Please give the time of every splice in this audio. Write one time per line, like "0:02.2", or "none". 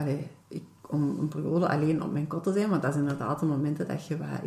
none